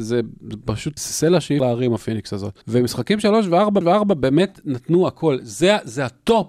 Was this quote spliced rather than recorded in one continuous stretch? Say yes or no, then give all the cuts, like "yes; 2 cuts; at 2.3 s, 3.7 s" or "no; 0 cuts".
yes; 4 cuts; at 1.0 s, 1.6 s, 2.6 s, 3.8 s